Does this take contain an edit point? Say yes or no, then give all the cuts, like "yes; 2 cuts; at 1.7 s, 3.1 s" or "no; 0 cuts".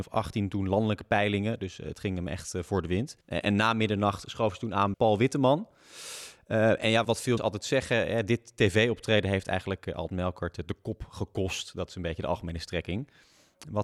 yes; 4 cuts; at 3.2 s, 4.9 s, 7.0 s, 7.4 s